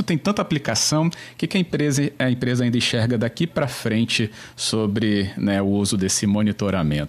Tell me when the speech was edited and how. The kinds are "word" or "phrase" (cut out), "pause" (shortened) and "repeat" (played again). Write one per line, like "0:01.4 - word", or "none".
none